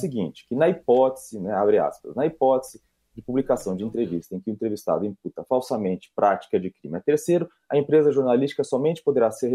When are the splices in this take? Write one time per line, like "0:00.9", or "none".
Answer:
none